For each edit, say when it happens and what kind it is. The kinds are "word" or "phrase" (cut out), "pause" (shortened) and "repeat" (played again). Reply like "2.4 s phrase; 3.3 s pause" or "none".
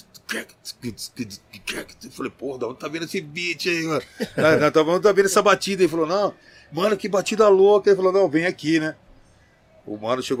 none